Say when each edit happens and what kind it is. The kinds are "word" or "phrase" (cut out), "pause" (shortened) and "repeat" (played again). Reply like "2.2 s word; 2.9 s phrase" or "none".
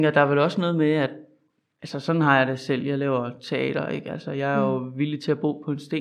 none